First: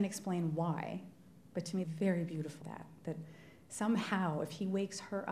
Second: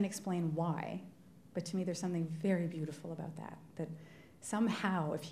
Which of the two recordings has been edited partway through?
first; 2 cuts; at 1.8 s, 2.6 s

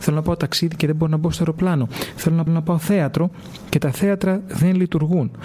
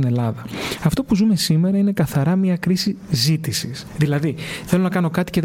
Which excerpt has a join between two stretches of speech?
first; 1 cut; at 2.5 s

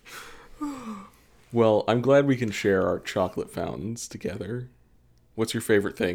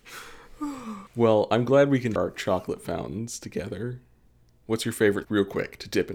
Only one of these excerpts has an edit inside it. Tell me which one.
second; 3 cuts; at 1.1 s, 2.2 s, 5.2 s

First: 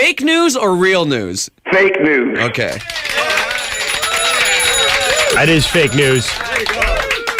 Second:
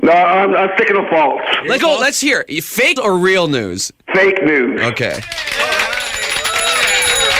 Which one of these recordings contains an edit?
second; 2 cuts; at 1.8 s, 3.0 s

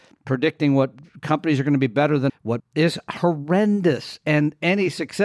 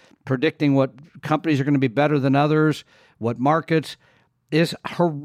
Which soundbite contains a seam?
first; 2 cuts; at 2.3 s, 2.6 s

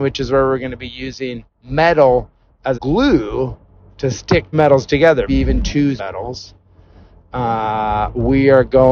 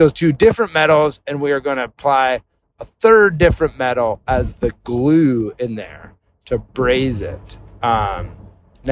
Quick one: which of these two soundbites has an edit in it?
first; 5 cuts; at 1.5 s, 2.7 s, 4.5 s, 5.3 s, 6.0 s

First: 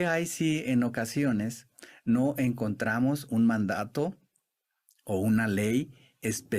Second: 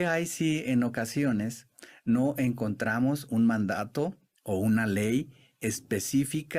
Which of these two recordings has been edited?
second; 1 cut; at 4.4 s

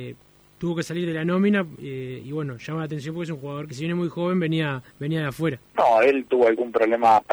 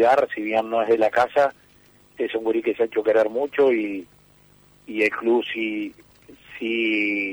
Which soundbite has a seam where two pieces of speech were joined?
first; 4 cuts; at 2.2 s, 3.7 s, 4.9 s, 5.7 s

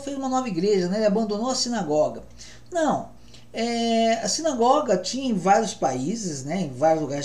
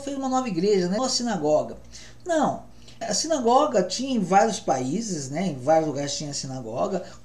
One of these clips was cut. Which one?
second; 2 cuts; at 1.0 s, 3.0 s

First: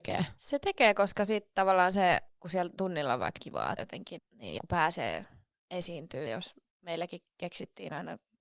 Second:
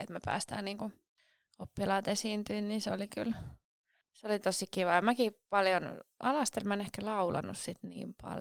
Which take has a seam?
first; 6 cuts; at 2.8 s, 3.4 s, 3.8 s, 4.2 s, 4.6 s, 6.3 s

